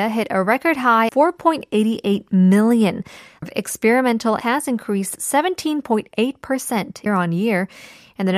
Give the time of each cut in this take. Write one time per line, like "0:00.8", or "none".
0:01.1
0:03.4
0:04.4
0:07.1